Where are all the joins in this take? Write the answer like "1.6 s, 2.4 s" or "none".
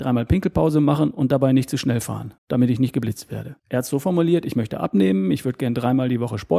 2.4 s, 3.6 s

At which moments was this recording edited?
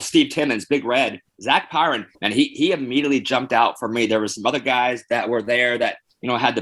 2.1 s

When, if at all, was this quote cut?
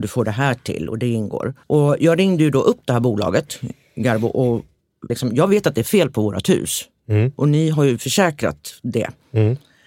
1.6 s, 5.1 s

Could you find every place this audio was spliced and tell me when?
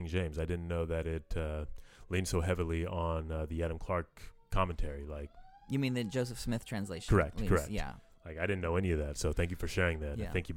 none

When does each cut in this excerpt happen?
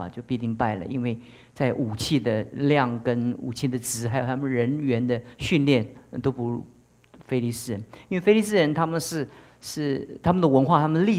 none

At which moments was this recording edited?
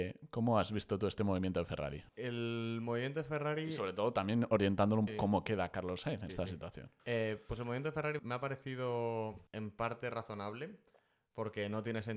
2.1 s, 5.1 s, 6.3 s, 7.0 s, 8.2 s, 9.5 s

